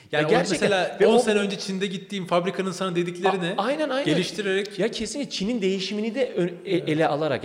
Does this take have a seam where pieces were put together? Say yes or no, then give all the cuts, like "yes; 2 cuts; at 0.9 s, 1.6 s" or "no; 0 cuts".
no; 0 cuts